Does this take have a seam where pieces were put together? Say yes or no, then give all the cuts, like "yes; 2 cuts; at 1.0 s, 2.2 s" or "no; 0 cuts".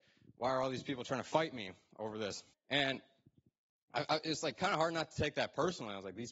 yes; 1 cut; at 2.5 s